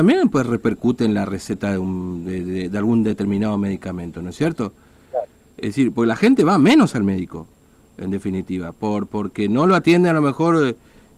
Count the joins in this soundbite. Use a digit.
0